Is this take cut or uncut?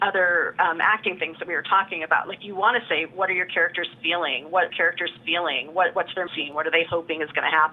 cut